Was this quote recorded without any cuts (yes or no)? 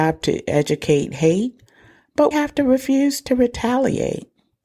no